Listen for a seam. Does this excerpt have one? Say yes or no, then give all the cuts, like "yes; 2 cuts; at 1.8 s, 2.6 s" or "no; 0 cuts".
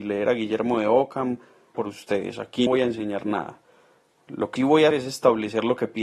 yes; 4 cuts; at 1.7 s, 2.7 s, 4.6 s, 4.9 s